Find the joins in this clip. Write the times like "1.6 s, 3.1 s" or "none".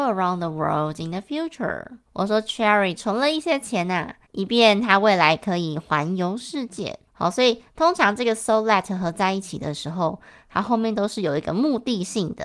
2.1 s, 4.2 s, 7.1 s